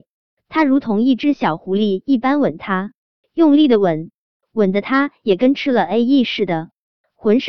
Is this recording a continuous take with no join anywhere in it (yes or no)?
yes